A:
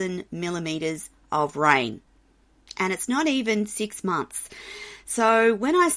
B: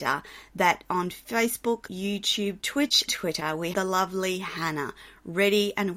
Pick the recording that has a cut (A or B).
B